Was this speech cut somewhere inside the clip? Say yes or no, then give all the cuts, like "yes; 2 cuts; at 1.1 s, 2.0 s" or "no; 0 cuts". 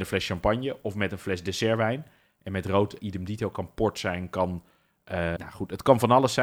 yes; 2 cuts; at 3.0 s, 5.4 s